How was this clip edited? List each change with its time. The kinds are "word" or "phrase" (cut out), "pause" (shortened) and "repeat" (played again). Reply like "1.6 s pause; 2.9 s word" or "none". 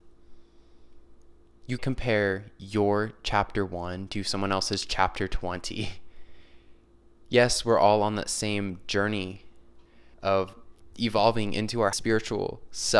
1.8 s word; 10.1 s pause; 11.9 s word